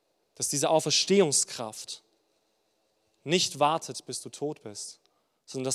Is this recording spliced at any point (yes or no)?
no